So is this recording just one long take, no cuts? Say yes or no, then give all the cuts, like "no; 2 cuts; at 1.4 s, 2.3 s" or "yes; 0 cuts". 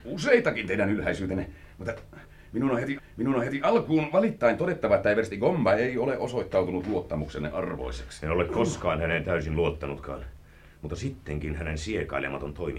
no; 1 cut; at 3.0 s